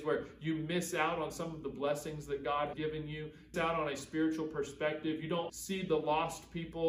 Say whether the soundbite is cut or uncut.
cut